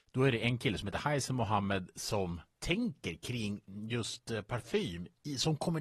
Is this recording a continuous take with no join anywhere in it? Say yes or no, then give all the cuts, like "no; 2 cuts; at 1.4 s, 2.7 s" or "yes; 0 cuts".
yes; 0 cuts